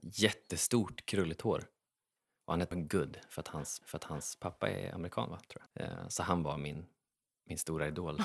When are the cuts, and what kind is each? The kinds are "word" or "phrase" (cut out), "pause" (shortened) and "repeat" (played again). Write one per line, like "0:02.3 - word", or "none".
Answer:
0:02.7 - word
0:03.8 - repeat
0:05.7 - pause